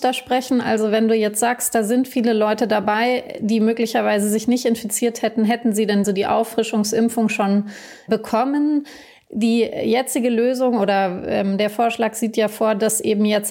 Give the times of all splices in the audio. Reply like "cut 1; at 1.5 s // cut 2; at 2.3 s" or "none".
cut 1; at 6.0 s

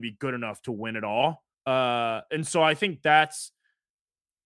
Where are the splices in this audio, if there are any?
cut 1; at 1.5 s

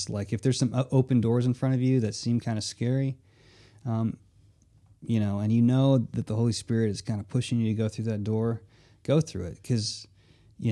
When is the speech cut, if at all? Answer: none

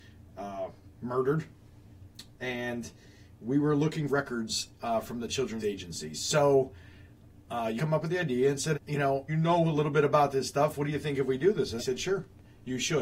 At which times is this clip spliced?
cut 1; at 4.1 s // cut 2; at 5.6 s // cut 3; at 7.8 s // cut 4; at 8.7 s // cut 5; at 9.3 s // cut 6; at 11.8 s

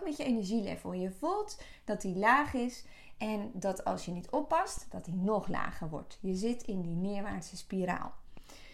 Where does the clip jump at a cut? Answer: none

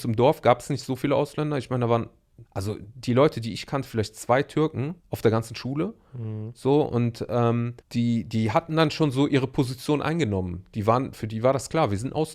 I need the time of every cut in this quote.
cut 1; at 2.5 s // cut 2; at 5.0 s // cut 3; at 7.8 s

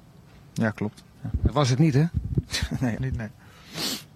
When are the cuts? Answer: cut 1; at 3.0 s

